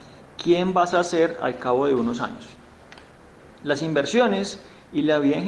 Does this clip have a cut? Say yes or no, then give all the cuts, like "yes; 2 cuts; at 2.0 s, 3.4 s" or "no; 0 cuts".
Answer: no; 0 cuts